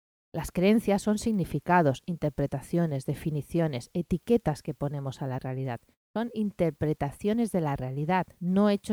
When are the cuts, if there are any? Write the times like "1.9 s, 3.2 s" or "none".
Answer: none